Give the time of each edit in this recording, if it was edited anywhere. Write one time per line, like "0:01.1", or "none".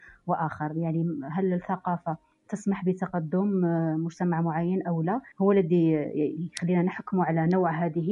0:05.3